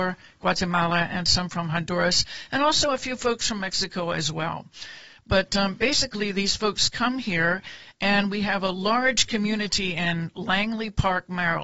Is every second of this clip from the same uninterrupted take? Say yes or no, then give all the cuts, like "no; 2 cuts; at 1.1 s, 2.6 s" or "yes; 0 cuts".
yes; 0 cuts